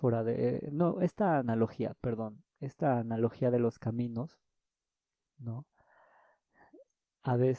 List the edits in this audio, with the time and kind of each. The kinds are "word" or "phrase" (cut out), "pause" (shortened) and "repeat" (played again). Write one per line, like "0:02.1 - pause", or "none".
none